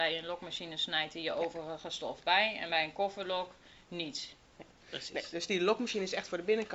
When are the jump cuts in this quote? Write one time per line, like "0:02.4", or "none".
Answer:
none